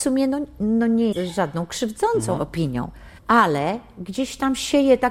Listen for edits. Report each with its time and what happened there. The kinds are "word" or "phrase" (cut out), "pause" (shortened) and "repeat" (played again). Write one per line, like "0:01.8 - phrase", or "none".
0:01.1 - word
0:03.2 - pause